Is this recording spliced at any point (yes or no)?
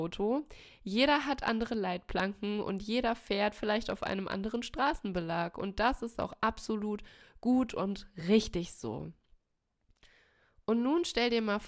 no